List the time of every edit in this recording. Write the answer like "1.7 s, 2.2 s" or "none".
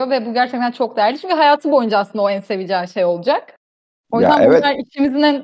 3.9 s